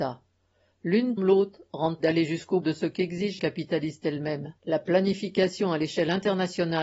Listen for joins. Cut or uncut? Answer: cut